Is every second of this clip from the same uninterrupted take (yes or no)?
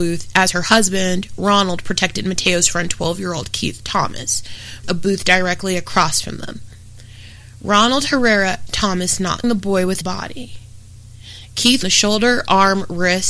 no